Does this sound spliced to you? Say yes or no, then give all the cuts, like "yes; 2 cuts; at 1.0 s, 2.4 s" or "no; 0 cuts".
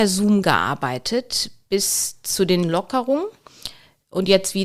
yes; 1 cut; at 2.6 s